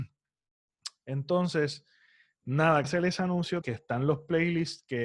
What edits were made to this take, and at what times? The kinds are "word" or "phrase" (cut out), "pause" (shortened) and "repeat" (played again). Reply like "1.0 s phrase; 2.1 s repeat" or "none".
2.8 s word; 3.6 s word